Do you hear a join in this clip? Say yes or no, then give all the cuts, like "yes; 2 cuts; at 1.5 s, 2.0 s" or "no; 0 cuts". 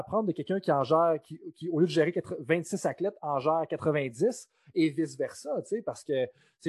no; 0 cuts